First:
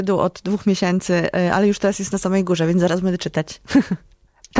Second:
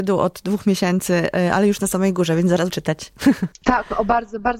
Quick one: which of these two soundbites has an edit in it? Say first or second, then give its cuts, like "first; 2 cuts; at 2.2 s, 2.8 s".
second; 3 cuts; at 1.8 s, 2.7 s, 3.5 s